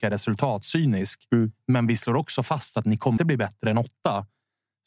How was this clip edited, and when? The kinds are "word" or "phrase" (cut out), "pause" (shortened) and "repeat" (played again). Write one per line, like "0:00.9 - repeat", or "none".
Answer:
0:03.2 - word

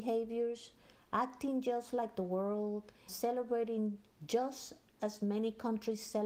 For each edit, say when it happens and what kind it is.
0:03.1 - word

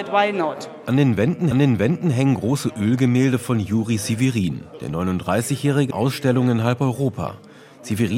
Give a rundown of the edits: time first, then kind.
0:01.5 - repeat
0:05.9 - phrase

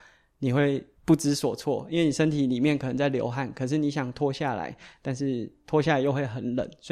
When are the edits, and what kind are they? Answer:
0:01.0 - pause

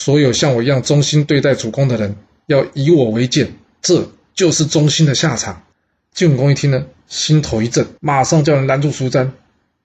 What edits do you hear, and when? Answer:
0:05.7 - pause
0:08.0 - pause

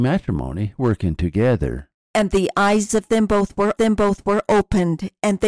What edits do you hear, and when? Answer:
0:03.8 - repeat

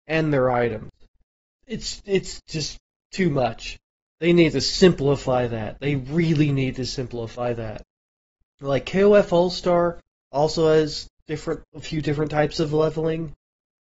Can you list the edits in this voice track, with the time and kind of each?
none

